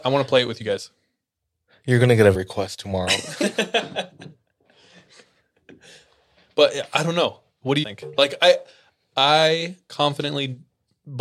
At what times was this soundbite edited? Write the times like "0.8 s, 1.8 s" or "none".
2.3 s, 7.8 s